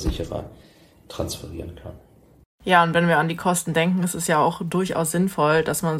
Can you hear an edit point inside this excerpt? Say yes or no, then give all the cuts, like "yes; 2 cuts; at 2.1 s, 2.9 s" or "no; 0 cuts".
no; 0 cuts